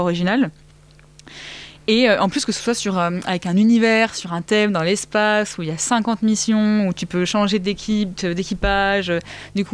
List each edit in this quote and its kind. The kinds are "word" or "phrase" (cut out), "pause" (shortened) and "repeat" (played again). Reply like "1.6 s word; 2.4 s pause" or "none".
none